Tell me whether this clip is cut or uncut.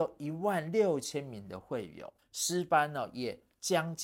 cut